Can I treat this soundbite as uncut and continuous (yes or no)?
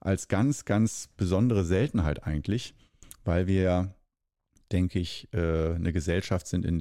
yes